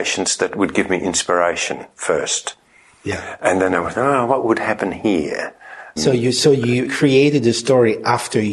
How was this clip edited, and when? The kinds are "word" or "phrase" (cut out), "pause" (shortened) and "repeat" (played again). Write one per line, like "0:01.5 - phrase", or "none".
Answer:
0:06.0 - word
0:06.8 - word